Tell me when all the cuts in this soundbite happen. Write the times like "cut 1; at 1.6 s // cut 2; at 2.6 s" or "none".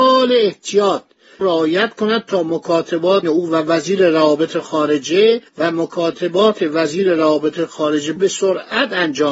cut 1; at 1.4 s // cut 2; at 3.2 s // cut 3; at 5.5 s // cut 4; at 8.2 s